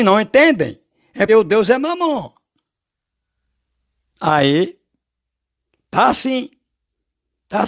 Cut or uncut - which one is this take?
cut